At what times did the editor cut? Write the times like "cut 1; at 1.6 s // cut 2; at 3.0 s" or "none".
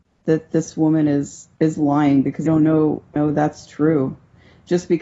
cut 1; at 1.5 s // cut 2; at 2.5 s // cut 3; at 3.2 s